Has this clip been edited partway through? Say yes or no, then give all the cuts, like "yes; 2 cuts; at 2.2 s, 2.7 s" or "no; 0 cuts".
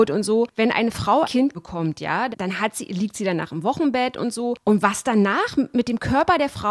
yes; 3 cuts; at 1.2 s, 1.5 s, 2.3 s